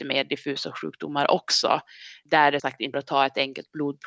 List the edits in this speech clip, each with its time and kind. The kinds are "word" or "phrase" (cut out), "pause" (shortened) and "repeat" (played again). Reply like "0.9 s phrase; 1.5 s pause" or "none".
2.6 s word; 2.9 s word

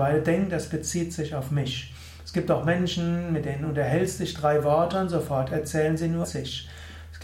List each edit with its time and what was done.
6.2 s word

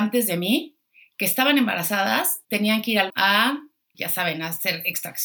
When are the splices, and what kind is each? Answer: 2.4 s pause; 3.1 s word; 3.9 s word

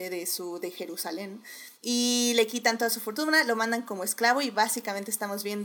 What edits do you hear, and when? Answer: 1.8 s pause

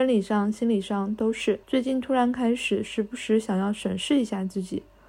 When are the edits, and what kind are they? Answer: 1.6 s pause

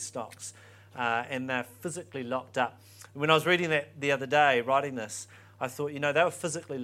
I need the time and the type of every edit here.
none

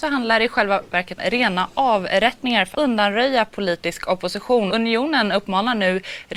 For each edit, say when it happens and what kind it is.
1.2 s word; 2.7 s word; 4.7 s word

